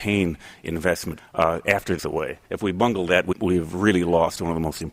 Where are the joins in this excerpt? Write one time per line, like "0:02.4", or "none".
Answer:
0:01.2
0:02.0
0:02.4
0:03.3